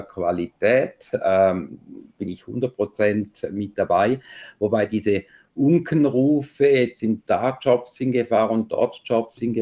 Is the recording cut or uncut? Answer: uncut